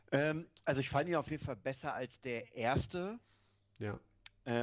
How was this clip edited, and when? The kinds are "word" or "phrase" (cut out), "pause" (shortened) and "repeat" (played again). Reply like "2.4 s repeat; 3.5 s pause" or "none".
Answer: none